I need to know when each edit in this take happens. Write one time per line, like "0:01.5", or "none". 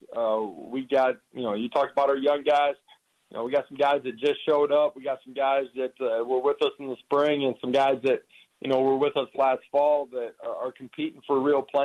none